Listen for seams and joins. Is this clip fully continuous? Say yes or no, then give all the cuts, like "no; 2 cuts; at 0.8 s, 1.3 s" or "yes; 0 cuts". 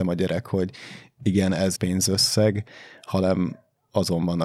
no; 1 cut; at 1.8 s